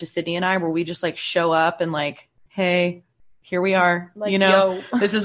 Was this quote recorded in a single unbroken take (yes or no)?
yes